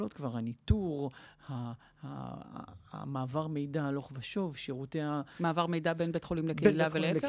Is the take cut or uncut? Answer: uncut